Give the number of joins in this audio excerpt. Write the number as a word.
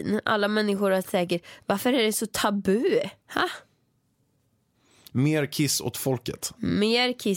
one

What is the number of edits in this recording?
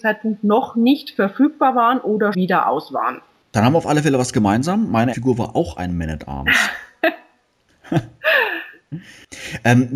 two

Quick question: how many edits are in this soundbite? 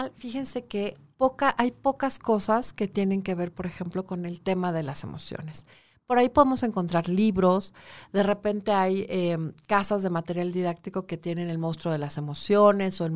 zero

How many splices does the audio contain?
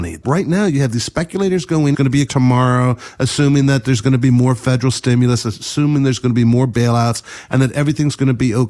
two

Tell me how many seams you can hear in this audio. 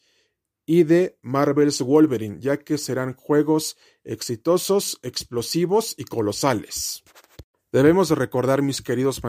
zero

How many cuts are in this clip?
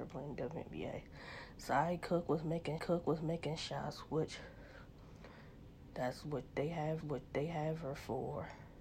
two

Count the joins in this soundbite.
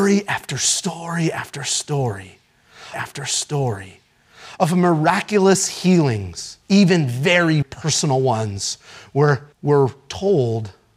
four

